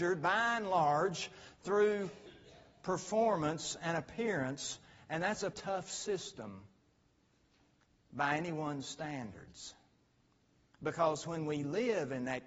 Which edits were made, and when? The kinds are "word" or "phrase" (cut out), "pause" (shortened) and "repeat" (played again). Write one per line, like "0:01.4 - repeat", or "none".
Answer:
0:05.5 - word

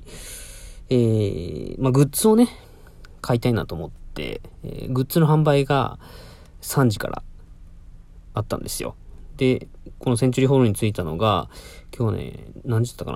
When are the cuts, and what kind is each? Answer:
0:04.5 - pause
0:09.7 - word

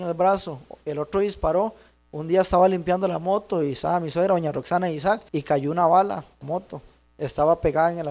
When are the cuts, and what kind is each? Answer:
0:05.3 - pause
0:06.4 - word

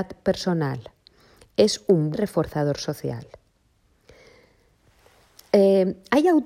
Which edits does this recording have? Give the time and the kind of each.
0:02.1 - word

